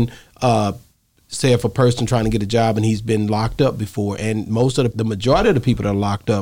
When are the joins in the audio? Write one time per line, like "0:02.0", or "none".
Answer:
0:04.9